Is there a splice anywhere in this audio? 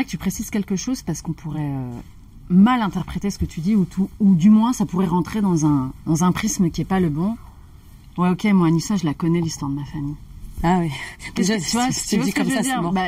no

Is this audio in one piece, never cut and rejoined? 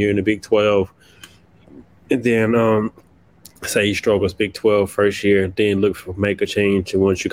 yes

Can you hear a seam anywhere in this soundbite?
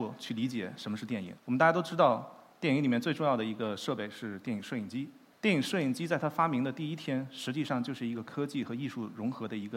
yes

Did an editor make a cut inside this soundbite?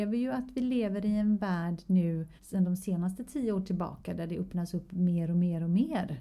yes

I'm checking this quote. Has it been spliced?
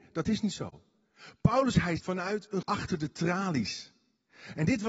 yes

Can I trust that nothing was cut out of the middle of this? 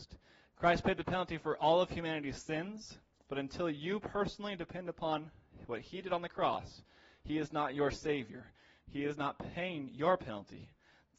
yes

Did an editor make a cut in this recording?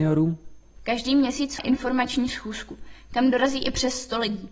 yes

